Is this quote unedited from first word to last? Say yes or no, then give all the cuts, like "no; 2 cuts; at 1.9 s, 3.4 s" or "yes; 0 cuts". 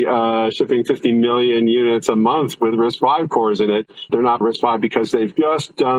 no; 2 cuts; at 4.1 s, 4.4 s